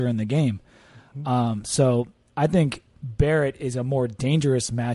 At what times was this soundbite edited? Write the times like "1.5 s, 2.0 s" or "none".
none